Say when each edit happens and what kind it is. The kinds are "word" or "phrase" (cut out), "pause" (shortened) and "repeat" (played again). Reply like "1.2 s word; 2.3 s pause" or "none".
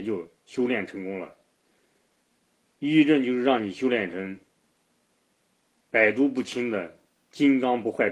none